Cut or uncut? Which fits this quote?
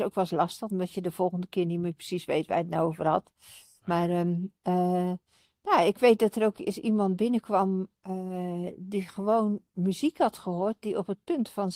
uncut